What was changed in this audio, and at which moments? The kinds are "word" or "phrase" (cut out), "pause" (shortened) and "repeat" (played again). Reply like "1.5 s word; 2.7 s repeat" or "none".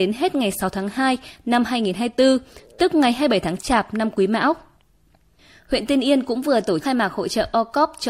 6.8 s word

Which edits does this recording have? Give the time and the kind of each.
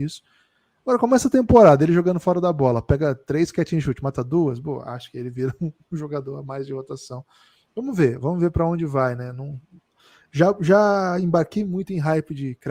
none

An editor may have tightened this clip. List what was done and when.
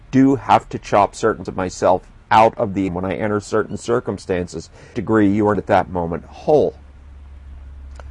1.5 s word; 2.1 s pause; 2.9 s word; 4.9 s phrase; 5.5 s word

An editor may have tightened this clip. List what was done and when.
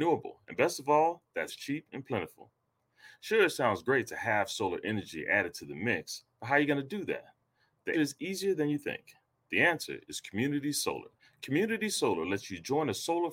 1.5 s word; 7.9 s word; 11.2 s pause

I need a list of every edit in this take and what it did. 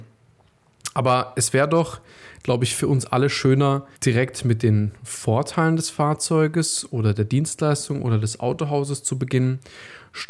4.0 s pause

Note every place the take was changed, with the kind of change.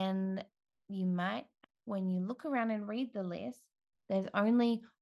none

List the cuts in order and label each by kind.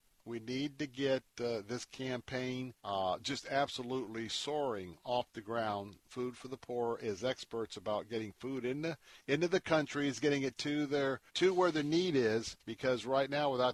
2.8 s pause; 6.0 s pause; 11.3 s pause; 12.6 s pause

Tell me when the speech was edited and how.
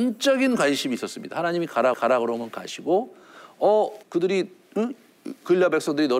1.9 s repeat; 4.0 s pause

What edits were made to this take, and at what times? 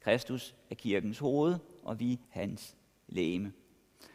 2.2 s pause

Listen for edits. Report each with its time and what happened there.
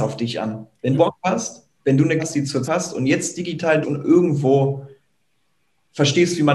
0.9 s word; 1.8 s pause; 2.2 s phrase; 2.6 s word; 3.8 s word

